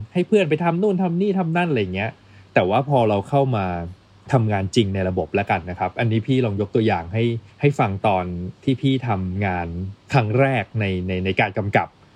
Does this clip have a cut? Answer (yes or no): yes